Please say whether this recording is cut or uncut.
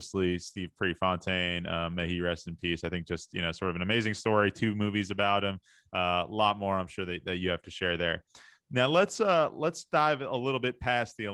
uncut